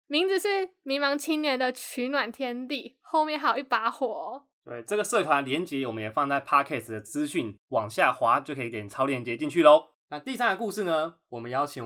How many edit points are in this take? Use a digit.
1